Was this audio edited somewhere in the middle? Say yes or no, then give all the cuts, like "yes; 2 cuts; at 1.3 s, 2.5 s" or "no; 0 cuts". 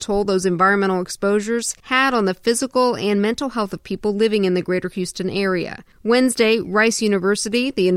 yes; 2 cuts; at 1.8 s, 5.9 s